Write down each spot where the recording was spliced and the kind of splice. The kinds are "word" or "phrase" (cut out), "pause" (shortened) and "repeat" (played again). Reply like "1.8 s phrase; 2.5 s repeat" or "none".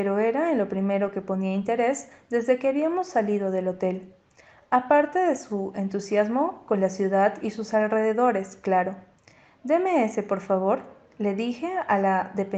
none